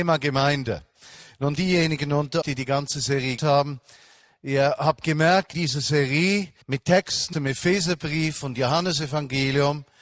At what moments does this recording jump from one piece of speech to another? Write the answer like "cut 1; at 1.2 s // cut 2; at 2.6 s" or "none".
cut 1; at 1.6 s // cut 2; at 2.4 s // cut 3; at 3.4 s // cut 4; at 5.5 s // cut 5; at 6.6 s // cut 6; at 7.3 s